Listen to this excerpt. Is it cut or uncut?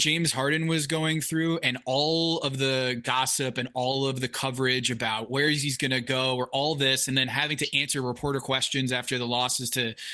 uncut